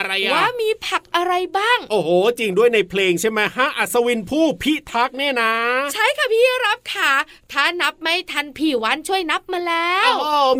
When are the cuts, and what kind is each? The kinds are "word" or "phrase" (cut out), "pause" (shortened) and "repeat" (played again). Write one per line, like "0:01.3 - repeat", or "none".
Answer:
none